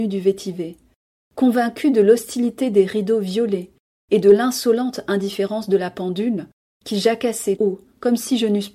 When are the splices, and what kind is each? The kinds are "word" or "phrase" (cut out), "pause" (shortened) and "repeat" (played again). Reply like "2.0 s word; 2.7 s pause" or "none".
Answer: 7.6 s word